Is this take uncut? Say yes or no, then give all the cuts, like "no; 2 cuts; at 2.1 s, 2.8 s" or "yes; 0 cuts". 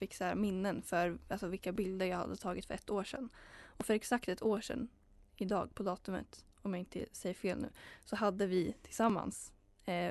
yes; 0 cuts